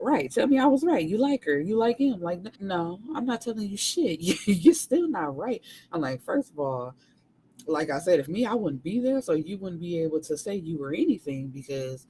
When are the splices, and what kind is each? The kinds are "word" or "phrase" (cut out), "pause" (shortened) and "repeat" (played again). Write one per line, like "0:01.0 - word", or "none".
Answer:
0:02.5 - pause
0:08.3 - phrase